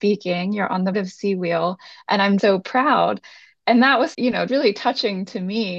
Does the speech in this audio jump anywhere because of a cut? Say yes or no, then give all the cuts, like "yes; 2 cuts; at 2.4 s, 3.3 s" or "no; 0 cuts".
yes; 4 cuts; at 0.9 s, 2.4 s, 4.1 s, 4.5 s